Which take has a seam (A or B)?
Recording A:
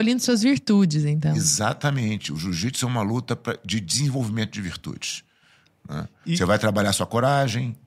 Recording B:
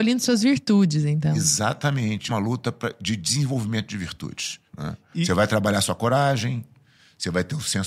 B